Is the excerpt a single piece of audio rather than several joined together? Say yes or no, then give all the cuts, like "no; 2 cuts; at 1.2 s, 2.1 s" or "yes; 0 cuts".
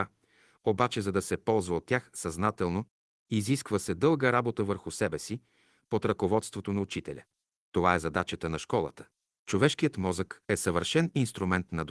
yes; 0 cuts